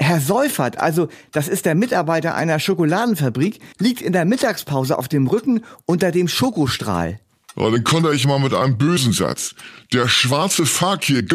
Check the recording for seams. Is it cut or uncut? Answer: cut